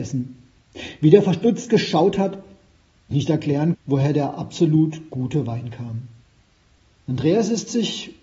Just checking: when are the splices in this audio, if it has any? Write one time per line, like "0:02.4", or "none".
0:03.1
0:03.7
0:06.8